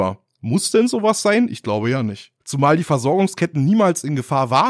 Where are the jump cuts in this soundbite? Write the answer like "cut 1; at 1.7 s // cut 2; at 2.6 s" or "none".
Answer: cut 1; at 2.4 s